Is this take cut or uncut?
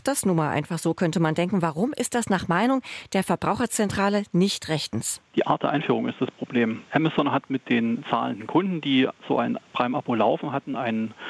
cut